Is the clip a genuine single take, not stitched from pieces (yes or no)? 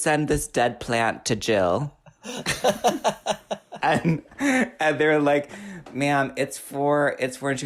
yes